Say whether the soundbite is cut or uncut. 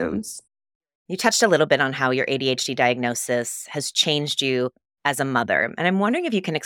uncut